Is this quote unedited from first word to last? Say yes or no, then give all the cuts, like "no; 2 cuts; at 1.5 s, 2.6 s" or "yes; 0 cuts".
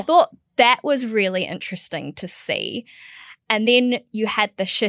yes; 0 cuts